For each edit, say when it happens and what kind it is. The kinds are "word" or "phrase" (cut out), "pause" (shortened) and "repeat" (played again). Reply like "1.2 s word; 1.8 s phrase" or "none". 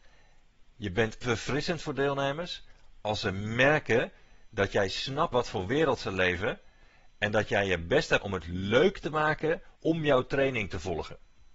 1.2 s word; 5.3 s word; 8.2 s word; 9.8 s pause